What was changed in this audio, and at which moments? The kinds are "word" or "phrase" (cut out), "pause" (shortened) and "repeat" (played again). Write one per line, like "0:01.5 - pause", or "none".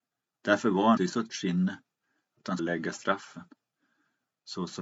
0:01.0 - word
0:01.3 - word
0:02.6 - word